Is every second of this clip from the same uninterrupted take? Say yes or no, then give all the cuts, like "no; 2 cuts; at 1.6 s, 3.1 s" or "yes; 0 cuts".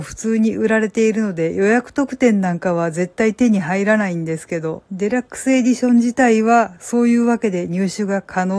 no; 1 cut; at 4.9 s